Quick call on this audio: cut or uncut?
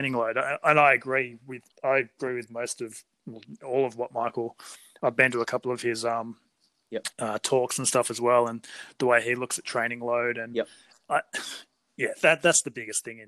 cut